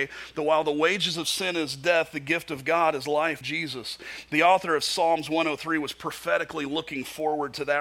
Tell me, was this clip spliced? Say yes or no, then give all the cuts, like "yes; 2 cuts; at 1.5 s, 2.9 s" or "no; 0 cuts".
yes; 1 cut; at 3.4 s